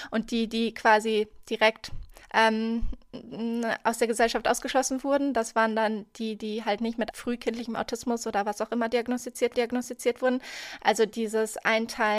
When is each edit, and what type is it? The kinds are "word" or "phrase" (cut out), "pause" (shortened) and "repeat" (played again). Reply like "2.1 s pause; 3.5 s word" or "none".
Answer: 2.2 s pause; 7.1 s phrase; 9.5 s repeat